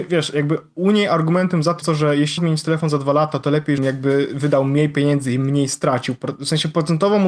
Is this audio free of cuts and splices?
no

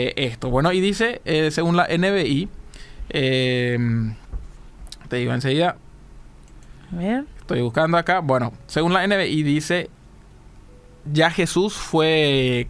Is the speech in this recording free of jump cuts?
yes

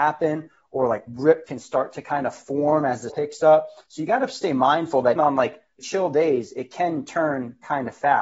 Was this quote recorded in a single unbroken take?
no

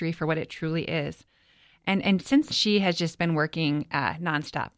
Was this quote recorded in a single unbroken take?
no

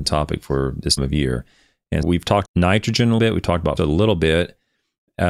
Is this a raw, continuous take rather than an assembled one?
no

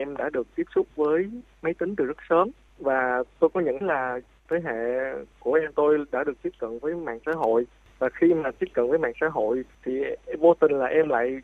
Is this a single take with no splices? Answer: no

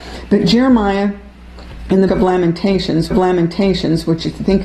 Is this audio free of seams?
no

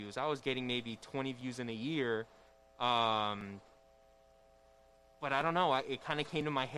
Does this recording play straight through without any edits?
yes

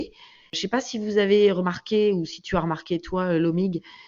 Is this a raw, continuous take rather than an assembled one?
yes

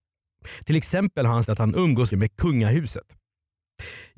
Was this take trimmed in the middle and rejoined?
yes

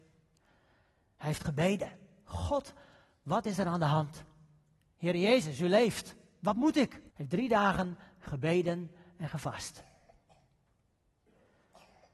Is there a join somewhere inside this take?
yes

